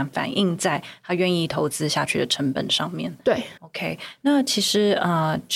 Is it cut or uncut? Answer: cut